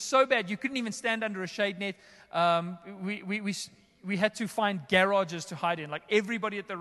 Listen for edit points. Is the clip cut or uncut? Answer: uncut